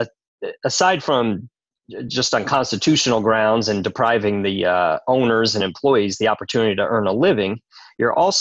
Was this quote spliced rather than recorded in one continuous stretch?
no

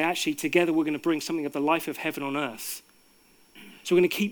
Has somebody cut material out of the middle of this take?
no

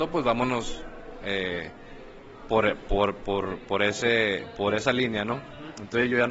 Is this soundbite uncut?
yes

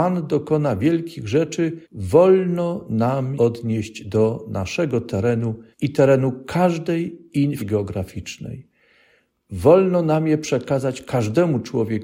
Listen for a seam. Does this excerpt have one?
yes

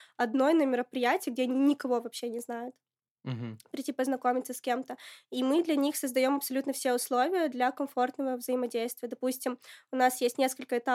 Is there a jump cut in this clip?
no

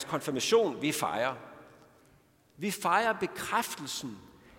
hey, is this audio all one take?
yes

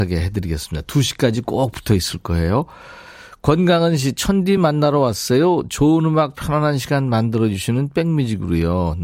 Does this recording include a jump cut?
no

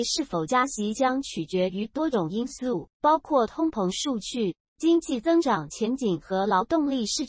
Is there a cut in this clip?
yes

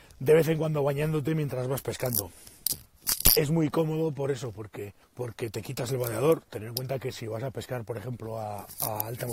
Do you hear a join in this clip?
yes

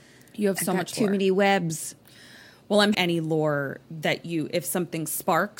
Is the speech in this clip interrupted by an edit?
yes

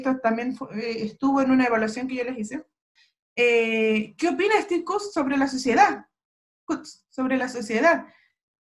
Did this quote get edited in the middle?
no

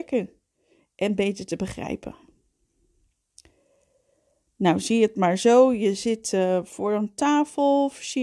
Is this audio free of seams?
yes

